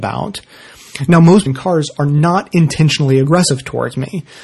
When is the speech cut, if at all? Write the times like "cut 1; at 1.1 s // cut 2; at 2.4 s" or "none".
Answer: cut 1; at 1.5 s